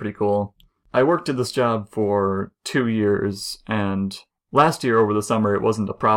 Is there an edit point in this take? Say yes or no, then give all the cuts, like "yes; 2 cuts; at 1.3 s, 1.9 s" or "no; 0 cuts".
no; 0 cuts